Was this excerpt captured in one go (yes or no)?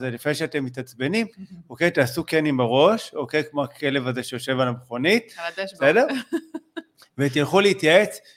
yes